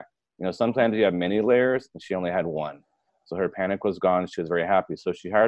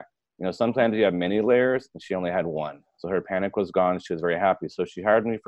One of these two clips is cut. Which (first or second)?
second